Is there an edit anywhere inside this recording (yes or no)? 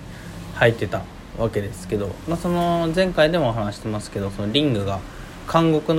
no